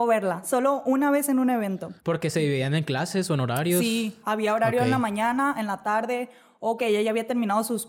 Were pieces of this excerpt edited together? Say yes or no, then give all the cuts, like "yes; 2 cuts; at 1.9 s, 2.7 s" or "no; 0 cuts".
yes; 3 cuts; at 2.0 s, 4.2 s, 6.8 s